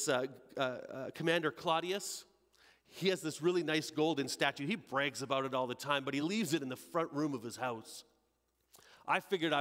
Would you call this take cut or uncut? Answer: uncut